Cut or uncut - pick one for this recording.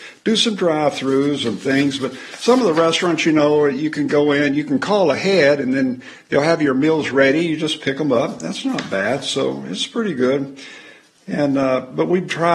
uncut